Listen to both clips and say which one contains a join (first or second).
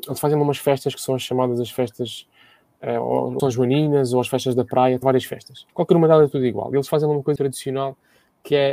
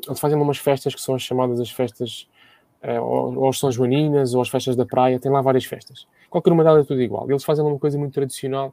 first